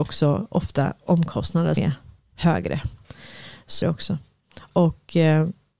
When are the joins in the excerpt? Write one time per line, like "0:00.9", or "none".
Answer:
0:01.8
0:03.8